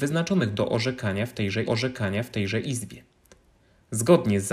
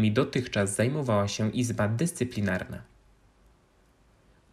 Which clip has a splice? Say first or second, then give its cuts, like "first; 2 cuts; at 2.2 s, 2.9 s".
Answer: first; 1 cut; at 1.7 s